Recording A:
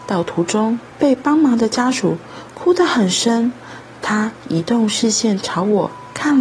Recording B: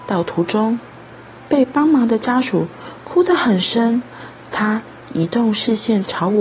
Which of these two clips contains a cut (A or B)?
A